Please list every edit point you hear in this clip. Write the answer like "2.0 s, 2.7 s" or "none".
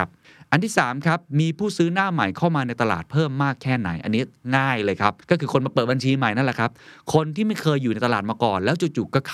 5.2 s